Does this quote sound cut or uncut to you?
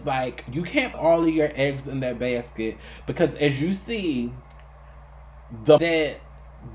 cut